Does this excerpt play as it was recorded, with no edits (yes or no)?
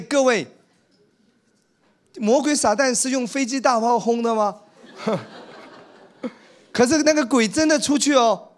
yes